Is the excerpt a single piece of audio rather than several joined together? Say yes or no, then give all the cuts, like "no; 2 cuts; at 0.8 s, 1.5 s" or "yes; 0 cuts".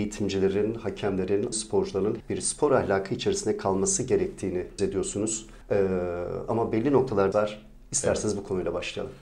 no; 5 cuts; at 1.5 s, 2.2 s, 4.8 s, 5.6 s, 7.3 s